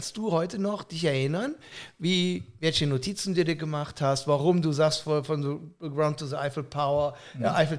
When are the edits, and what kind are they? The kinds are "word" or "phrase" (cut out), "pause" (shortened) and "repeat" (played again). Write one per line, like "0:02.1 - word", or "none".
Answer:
none

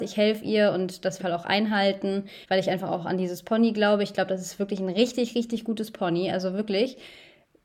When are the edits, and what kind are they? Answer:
0:01.2 - phrase
0:02.4 - pause

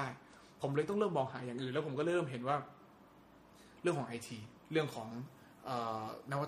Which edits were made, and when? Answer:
0:04.6 - pause

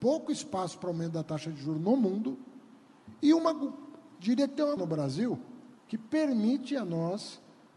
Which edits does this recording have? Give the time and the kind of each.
0:04.8 - word
0:05.8 - pause

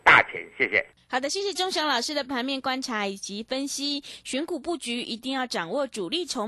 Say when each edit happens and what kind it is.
0:00.9 - pause

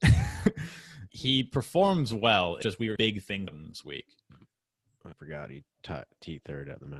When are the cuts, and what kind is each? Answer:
0:01.1 - word
0:02.6 - word
0:03.0 - word
0:03.5 - word
0:05.1 - word

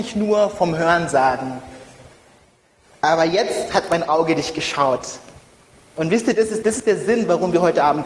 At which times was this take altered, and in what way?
0:06.6 - word

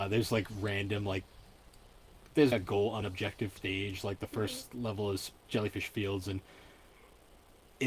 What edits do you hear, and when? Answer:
0:02.5 - word
0:03.0 - word
0:03.6 - word
0:05.4 - pause

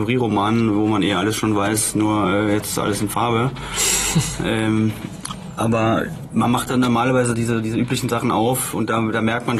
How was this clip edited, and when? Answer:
none

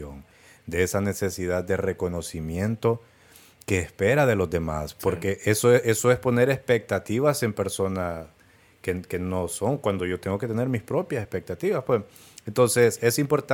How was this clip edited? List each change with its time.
none

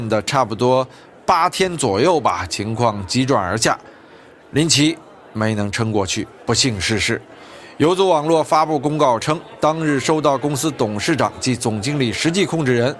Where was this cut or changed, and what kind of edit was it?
none

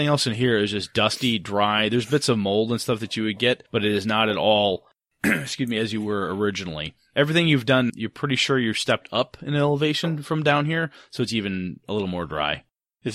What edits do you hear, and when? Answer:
0:03.7 - pause
0:07.9 - word

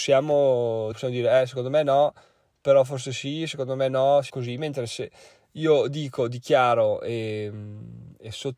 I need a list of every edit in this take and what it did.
0:00.9 - word
0:04.3 - word

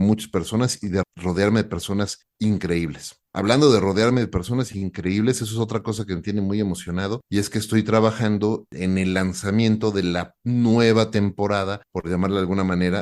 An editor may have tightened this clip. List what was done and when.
0:03.2 - pause

